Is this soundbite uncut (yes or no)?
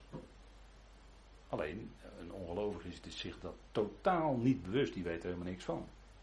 yes